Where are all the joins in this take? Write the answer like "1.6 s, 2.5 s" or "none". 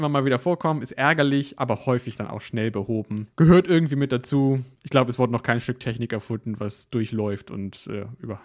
3.3 s, 4.7 s